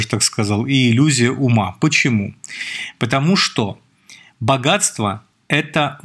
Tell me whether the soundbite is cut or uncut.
uncut